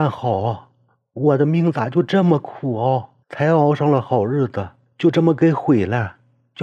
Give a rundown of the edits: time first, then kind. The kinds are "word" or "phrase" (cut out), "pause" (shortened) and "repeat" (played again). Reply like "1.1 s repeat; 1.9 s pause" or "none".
3.2 s pause